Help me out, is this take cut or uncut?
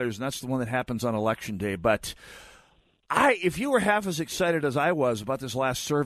uncut